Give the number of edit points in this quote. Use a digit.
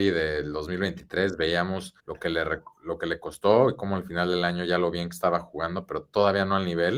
1